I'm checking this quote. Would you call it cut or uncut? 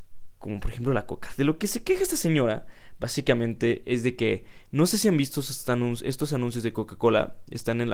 uncut